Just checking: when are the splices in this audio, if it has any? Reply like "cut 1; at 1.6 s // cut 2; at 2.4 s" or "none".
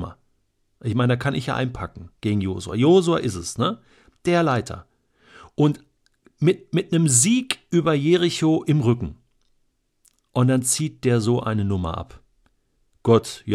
none